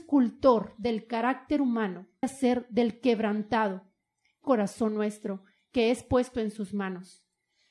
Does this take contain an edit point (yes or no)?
yes